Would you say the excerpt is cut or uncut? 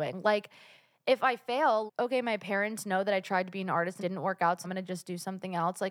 cut